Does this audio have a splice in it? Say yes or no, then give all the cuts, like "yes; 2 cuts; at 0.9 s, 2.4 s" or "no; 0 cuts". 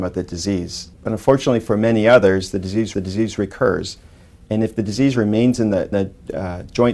yes; 3 cuts; at 0.9 s, 2.9 s, 5.9 s